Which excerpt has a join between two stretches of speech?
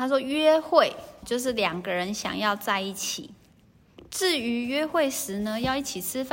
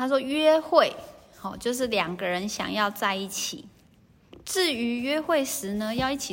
first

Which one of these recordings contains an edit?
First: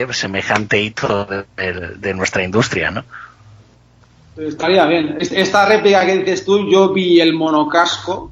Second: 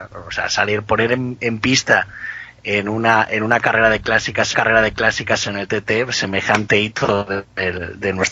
second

